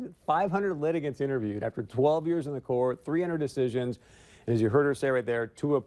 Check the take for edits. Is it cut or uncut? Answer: uncut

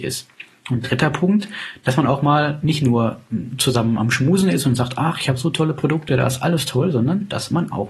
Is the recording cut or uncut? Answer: uncut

